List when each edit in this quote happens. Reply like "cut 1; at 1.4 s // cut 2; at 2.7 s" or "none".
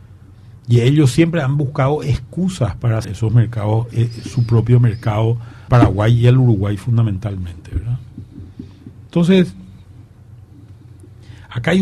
cut 1; at 3.0 s // cut 2; at 3.9 s // cut 3; at 5.7 s